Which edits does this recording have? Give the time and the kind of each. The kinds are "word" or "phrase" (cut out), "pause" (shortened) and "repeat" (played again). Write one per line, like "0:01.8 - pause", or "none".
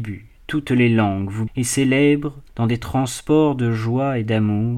0:01.5 - word
0:02.5 - pause